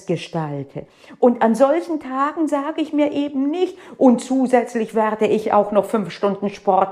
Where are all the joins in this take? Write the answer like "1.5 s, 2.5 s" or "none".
none